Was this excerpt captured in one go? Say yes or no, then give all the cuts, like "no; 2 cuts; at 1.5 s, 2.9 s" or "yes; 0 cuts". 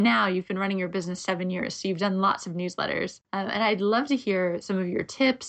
yes; 0 cuts